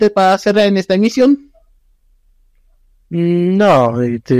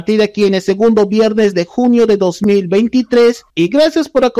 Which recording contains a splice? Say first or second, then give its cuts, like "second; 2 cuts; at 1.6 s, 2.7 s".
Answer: second; 1 cut; at 3.5 s